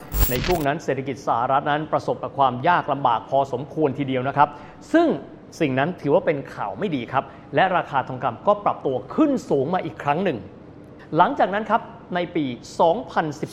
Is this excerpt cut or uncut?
uncut